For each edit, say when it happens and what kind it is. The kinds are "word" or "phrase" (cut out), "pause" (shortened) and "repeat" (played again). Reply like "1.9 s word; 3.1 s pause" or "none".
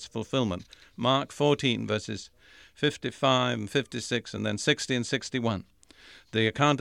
none